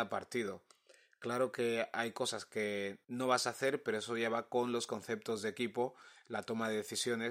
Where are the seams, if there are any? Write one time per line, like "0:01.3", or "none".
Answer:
0:03.0